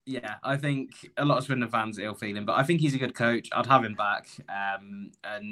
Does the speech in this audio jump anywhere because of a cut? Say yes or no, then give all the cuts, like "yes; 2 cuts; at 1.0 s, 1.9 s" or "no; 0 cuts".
no; 0 cuts